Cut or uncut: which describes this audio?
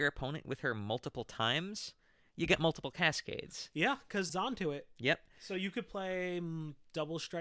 cut